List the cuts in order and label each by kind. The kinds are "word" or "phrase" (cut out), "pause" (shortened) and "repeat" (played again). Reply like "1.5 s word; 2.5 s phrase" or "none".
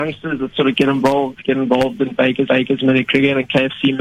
2.5 s repeat